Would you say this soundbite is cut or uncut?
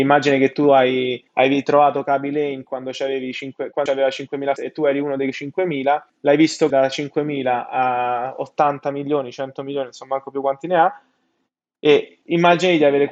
cut